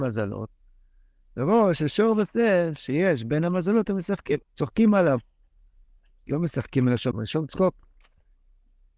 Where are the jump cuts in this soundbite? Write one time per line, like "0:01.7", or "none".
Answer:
0:04.4
0:07.1